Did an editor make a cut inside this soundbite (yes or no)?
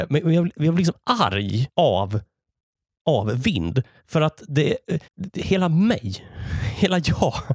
yes